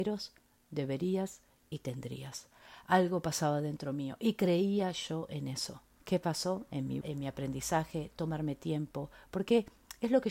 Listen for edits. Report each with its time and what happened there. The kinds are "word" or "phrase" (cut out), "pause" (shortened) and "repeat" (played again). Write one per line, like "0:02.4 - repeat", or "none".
0:06.0 - pause
0:07.0 - word